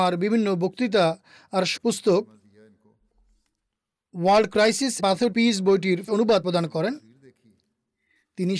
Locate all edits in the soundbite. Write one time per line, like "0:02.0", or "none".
0:01.8
0:05.0
0:05.3
0:06.1
0:06.4

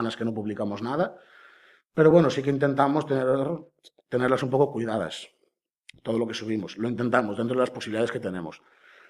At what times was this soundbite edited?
none

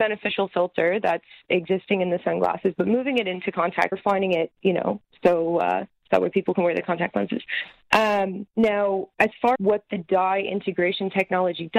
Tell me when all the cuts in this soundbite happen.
0:03.9
0:08.5
0:09.5

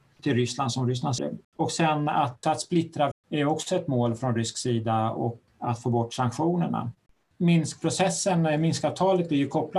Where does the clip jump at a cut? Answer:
0:01.2
0:02.4
0:03.1
0:05.5
0:07.1

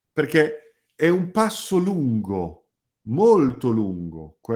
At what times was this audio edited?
none

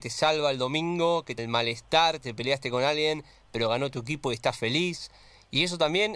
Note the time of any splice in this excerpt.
0:01.4

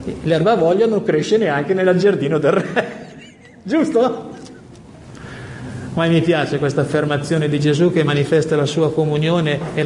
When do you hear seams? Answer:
none

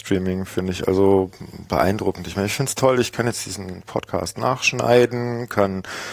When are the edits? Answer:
none

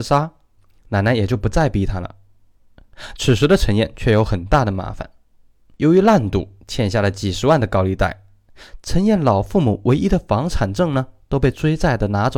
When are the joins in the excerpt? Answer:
none

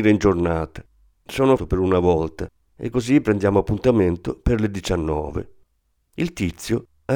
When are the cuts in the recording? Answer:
0:01.6

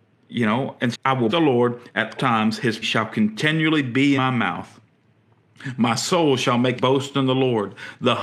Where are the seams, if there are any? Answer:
0:00.9
0:01.3
0:02.2
0:02.8
0:04.2
0:06.8

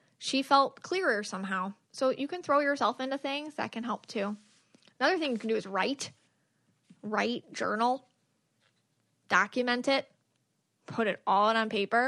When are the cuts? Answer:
none

